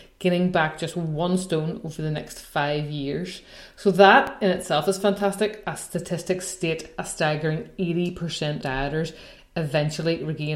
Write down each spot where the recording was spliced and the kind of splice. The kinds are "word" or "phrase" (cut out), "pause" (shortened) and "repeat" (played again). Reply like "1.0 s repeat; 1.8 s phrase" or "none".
8.6 s word